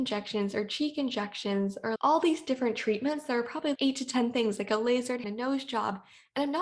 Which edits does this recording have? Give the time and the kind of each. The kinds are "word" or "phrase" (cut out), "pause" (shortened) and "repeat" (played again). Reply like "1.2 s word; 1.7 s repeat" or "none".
3.8 s word; 5.2 s word